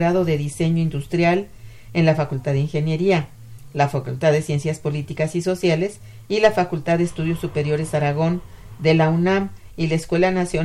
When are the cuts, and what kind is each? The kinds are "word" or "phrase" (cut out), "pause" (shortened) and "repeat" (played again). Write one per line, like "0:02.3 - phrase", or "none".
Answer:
none